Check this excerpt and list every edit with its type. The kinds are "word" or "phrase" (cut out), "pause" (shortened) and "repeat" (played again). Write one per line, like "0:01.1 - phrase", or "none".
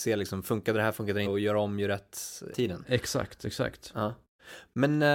0:01.3 - word
0:02.5 - word

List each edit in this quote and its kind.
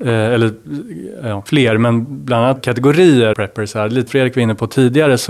0:01.5 - word
0:02.6 - word
0:03.3 - word
0:04.1 - word

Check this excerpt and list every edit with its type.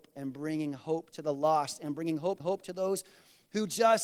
0:02.4 - repeat

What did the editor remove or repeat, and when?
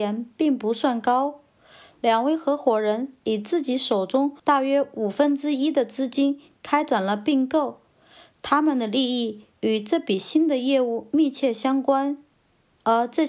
0:04.4 - pause

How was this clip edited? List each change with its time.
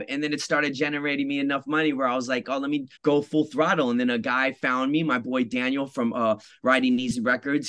0:03.0 - pause

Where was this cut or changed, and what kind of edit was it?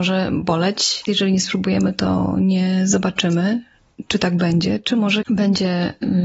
0:01.1 - word
0:05.2 - word

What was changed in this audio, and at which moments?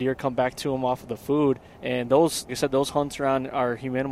0:01.7 - pause
0:02.5 - word

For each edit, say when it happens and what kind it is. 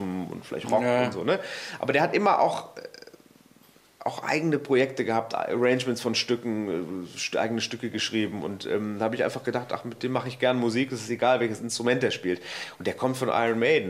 none

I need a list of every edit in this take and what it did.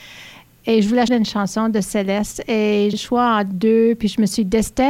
0:01.1 - word
0:02.9 - word

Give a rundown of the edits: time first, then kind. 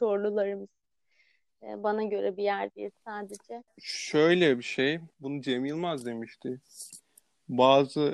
0:05.1 - pause

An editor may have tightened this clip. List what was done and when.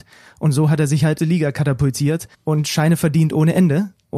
0:01.2 - phrase
0:02.3 - pause

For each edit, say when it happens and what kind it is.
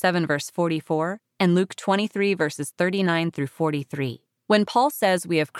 0:04.3 - pause

